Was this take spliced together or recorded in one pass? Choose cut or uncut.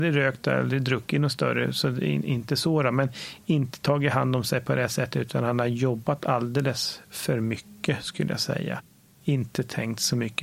uncut